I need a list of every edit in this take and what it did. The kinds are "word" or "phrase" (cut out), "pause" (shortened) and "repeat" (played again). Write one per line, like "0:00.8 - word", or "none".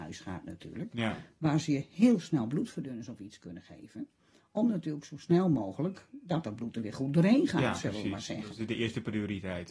none